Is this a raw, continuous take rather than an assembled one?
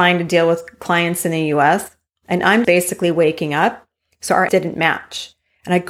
no; 2 cuts; at 2.6 s, 4.5 s

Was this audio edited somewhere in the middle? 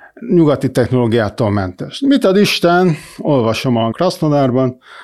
yes; 1 cut; at 3.9 s

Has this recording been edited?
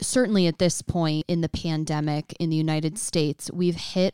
no; 0 cuts

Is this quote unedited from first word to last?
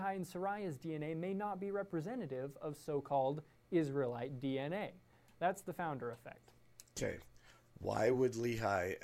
yes; 0 cuts

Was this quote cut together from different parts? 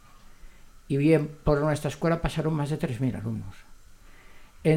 no; 0 cuts

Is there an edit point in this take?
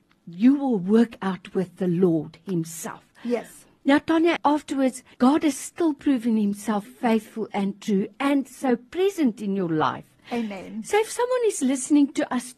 yes; 2 cuts; at 5.1 s, 6.8 s

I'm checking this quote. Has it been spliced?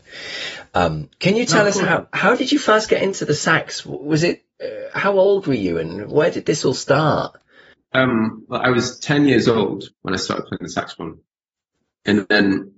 yes; 1 cut; at 7.7 s

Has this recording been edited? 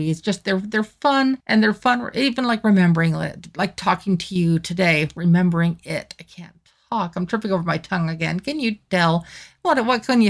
yes; 1 cut; at 1.4 s

